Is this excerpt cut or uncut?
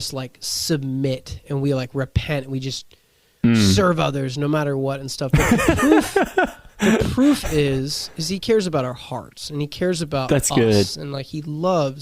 uncut